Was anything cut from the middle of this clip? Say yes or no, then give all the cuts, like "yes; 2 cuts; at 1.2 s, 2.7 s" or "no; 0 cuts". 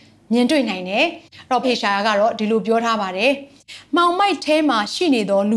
yes; 1 cut; at 1.6 s